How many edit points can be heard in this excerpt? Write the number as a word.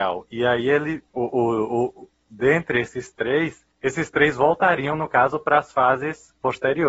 two